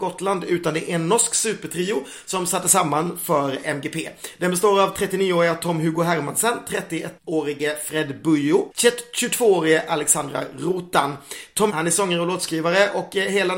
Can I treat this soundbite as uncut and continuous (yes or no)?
no